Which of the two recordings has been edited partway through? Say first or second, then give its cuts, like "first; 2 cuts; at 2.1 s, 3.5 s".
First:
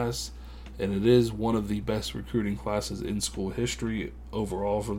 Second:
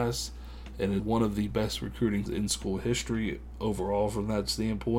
second; 2 cuts; at 1.0 s, 2.3 s